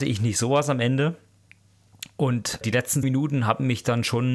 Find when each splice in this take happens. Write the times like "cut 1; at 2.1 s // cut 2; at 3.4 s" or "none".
cut 1; at 2.6 s // cut 2; at 3.0 s